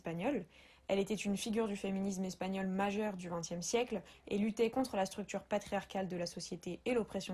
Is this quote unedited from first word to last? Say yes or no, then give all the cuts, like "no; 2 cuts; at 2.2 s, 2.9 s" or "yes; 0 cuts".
yes; 0 cuts